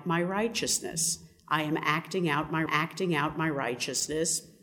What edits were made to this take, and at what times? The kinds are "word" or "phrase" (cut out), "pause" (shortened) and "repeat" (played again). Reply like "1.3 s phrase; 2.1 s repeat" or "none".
2.7 s repeat